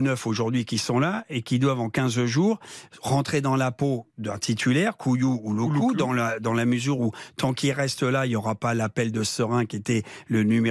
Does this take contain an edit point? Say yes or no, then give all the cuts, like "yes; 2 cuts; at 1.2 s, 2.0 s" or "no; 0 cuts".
no; 0 cuts